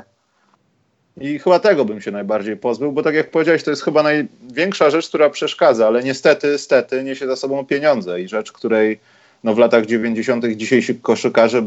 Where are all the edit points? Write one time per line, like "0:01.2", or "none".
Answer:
none